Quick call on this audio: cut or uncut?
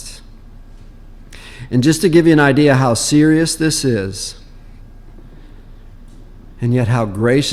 uncut